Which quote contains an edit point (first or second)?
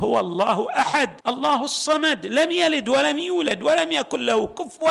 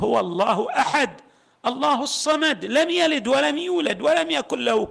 first